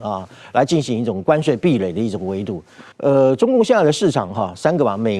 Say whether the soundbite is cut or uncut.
cut